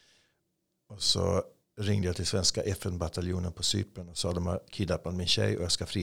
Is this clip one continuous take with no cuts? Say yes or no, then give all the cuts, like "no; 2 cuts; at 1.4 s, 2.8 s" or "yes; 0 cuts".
yes; 0 cuts